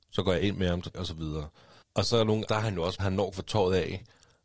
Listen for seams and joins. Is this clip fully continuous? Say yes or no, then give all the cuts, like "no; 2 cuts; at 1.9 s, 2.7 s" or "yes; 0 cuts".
no; 5 cuts; at 0.9 s, 1.8 s, 2.5 s, 3.0 s, 3.3 s